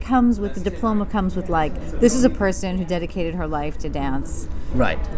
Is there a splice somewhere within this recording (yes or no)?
no